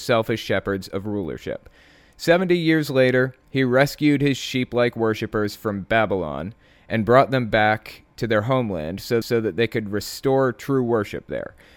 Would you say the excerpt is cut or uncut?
cut